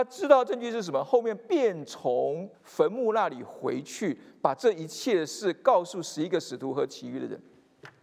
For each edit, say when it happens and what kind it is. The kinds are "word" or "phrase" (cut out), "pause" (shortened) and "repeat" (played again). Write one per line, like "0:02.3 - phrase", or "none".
0:02.5 - pause

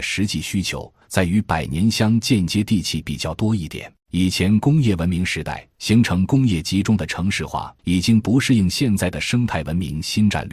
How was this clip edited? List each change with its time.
0:01.0 - pause
0:04.0 - pause
0:05.7 - pause
0:07.8 - pause

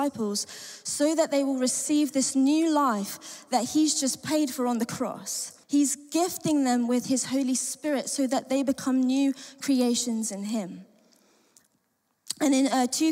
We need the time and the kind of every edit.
0:05.6 - pause

